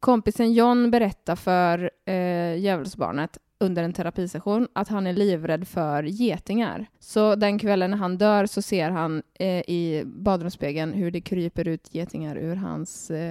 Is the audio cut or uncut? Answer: cut